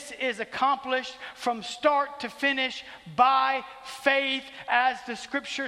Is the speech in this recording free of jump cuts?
yes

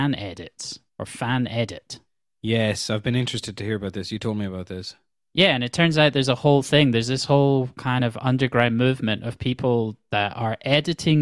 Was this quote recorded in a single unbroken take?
yes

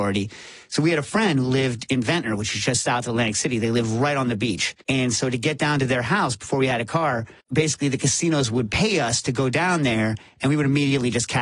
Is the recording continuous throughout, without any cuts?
no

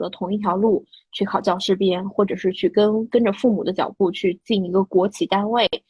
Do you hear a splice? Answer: no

